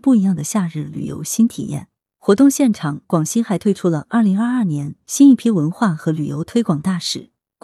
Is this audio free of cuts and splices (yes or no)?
yes